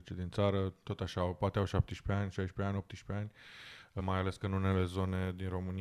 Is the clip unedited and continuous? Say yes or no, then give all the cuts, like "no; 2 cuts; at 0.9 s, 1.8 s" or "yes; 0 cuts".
no; 1 cut; at 4.0 s